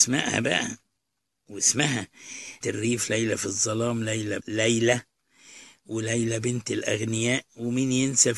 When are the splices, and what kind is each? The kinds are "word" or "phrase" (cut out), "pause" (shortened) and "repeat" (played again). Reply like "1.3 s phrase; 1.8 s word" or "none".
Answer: 2.6 s phrase; 4.4 s phrase

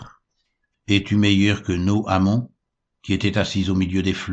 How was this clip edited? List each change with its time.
none

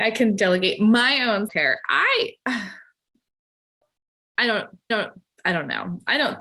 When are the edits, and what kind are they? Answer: 1.5 s word; 4.9 s repeat

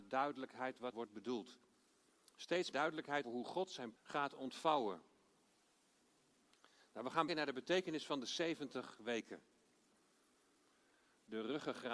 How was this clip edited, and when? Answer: 0.9 s word; 2.7 s word; 3.2 s word; 4.0 s word; 7.3 s word

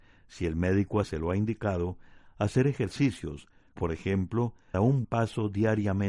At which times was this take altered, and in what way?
1.0 s word; 3.8 s word; 4.7 s word; 5.0 s word

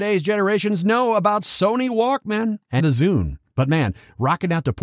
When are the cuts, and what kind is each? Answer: 2.8 s word

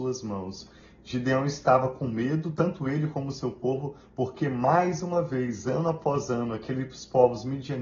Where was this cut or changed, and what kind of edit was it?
none

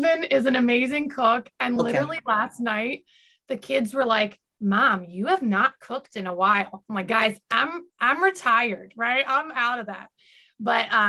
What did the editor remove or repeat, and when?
none

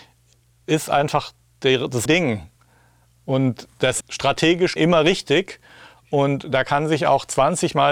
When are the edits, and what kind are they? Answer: 2.1 s word; 4.0 s word; 4.8 s word

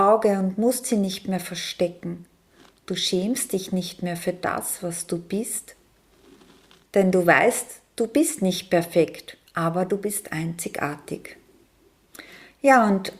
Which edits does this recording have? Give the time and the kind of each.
9.5 s pause

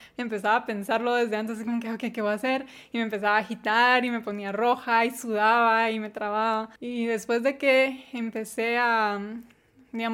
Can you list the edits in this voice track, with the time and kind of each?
6.8 s pause

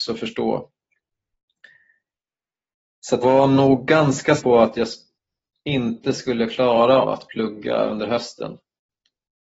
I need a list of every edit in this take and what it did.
3.2 s word; 4.4 s word; 7.0 s word

